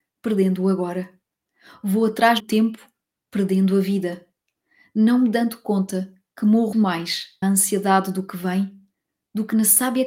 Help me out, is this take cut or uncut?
cut